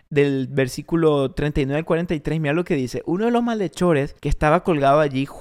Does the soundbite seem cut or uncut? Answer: cut